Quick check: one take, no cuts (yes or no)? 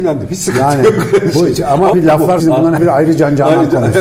no